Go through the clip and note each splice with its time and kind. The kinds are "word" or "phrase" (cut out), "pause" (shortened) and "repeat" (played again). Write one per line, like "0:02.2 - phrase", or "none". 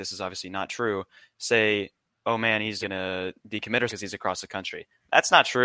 0:02.8 - word
0:03.9 - word